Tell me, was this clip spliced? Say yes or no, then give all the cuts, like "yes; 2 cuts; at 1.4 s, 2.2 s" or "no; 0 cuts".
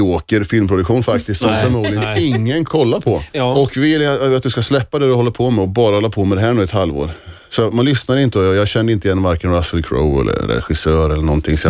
yes; 3 cuts; at 2.7 s, 3.3 s, 7.7 s